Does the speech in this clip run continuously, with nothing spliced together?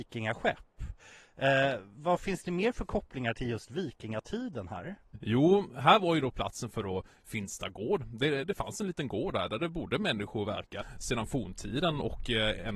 yes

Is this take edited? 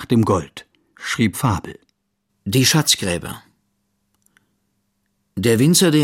yes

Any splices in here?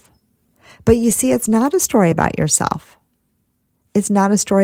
no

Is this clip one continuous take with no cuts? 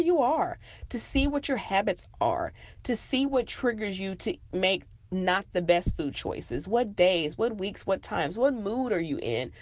yes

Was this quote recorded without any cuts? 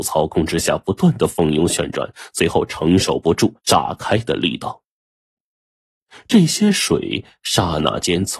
no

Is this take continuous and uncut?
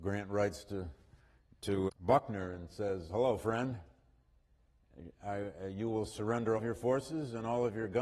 no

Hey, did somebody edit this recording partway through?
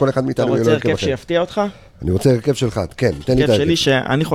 no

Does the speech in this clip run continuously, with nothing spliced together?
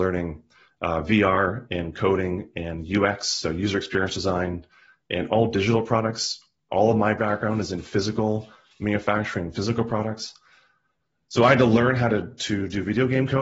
yes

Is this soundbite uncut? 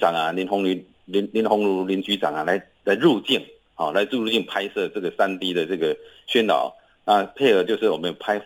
yes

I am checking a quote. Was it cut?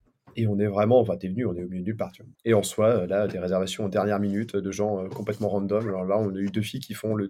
yes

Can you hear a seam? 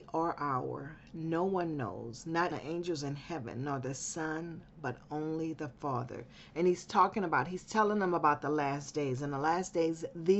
yes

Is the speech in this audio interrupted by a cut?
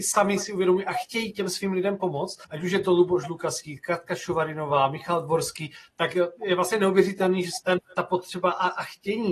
yes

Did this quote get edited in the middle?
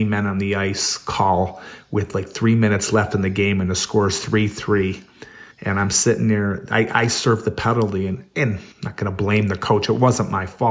yes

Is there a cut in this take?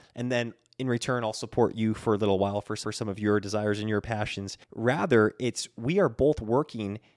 yes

